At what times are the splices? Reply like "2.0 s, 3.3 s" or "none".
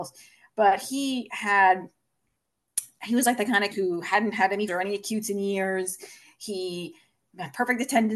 3.7 s, 4.7 s